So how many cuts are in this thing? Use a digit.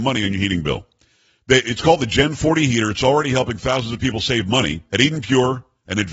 1